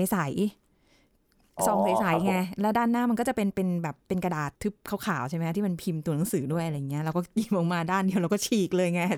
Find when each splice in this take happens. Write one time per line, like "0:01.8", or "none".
0:04.6